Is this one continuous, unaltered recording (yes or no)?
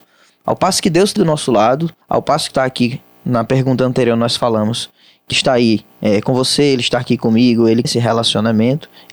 no